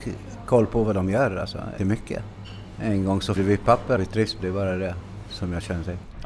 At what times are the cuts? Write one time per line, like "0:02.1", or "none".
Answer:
0:01.8
0:03.4
0:04.0
0:04.4